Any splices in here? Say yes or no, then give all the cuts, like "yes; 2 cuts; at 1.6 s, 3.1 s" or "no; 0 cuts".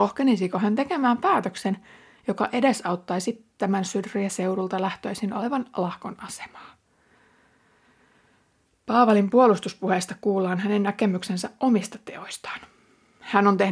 no; 0 cuts